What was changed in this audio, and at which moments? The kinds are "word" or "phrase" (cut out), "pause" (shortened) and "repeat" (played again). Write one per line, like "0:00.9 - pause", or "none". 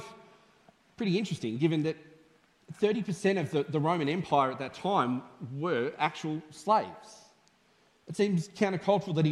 none